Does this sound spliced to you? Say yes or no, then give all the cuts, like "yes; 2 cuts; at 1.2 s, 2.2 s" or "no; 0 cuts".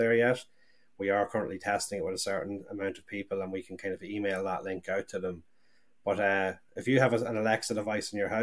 no; 0 cuts